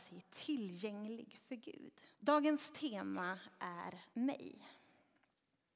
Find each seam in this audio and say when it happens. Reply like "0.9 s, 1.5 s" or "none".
2.1 s, 4.1 s